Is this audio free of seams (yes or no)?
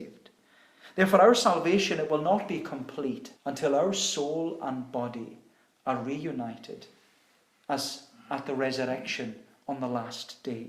no